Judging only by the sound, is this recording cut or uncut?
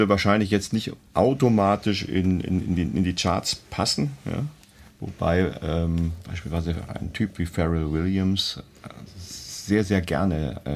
uncut